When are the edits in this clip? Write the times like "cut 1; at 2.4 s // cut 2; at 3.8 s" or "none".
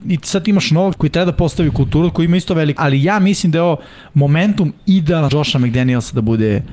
cut 1; at 1.0 s // cut 2; at 2.8 s // cut 3; at 5.3 s